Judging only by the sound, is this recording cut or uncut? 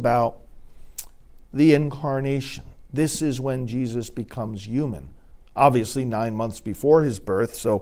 uncut